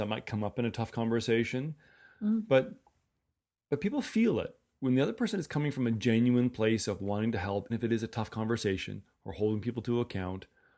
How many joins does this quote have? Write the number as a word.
one